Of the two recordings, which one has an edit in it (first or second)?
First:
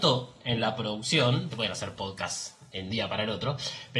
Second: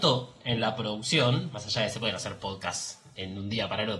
first